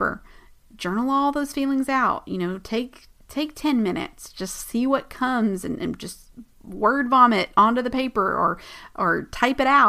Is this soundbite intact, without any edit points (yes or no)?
yes